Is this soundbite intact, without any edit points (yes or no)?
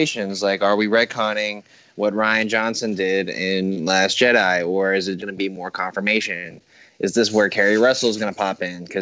no